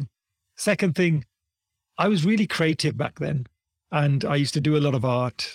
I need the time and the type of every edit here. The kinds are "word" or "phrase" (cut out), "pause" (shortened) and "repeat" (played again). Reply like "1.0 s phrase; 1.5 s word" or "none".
none